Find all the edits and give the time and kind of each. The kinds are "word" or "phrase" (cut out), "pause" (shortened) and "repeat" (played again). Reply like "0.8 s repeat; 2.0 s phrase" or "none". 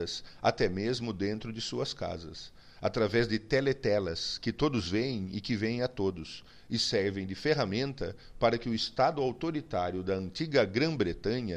none

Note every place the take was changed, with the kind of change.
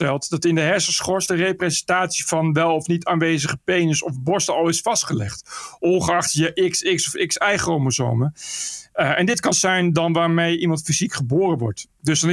9.5 s word

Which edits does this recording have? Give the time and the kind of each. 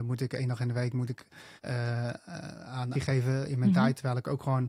1.6 s pause; 2.9 s phrase

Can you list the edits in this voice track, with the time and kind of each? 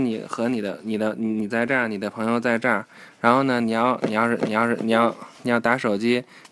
4.4 s repeat

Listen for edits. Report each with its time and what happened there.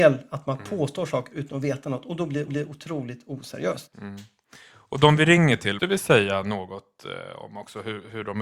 2.5 s repeat; 5.8 s word

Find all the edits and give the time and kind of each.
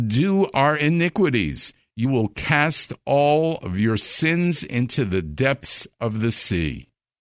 none

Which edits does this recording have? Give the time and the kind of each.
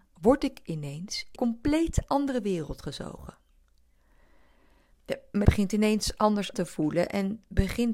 1.4 s word; 5.4 s word; 6.5 s word

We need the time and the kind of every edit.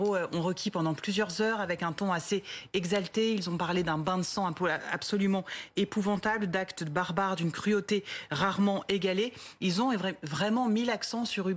none

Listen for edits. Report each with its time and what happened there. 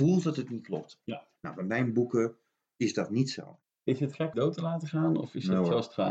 1.4 s pause; 3.7 s pause; 4.3 s phrase

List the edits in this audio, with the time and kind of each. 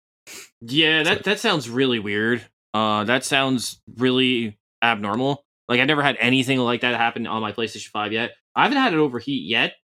none

